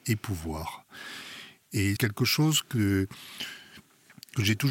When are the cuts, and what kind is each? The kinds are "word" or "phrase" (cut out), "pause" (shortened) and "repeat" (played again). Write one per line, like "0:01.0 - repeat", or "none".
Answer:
0:02.0 - word